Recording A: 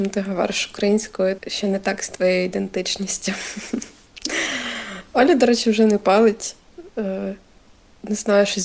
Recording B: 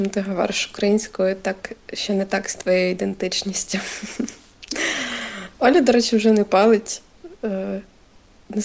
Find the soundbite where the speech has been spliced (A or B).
A